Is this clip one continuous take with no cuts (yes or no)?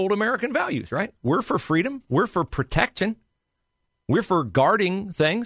yes